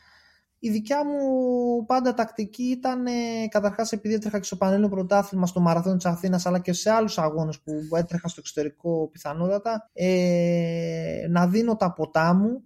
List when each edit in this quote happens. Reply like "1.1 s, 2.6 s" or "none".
9.9 s